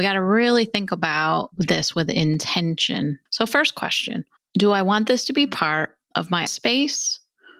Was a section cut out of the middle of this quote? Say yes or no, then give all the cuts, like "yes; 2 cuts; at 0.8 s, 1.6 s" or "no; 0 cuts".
yes; 2 cuts; at 3.3 s, 6.5 s